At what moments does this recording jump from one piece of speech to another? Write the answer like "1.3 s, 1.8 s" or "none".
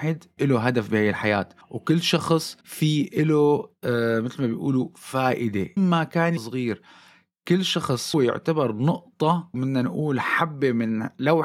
1.6 s, 2.6 s, 5.8 s, 6.4 s, 8.1 s, 9.5 s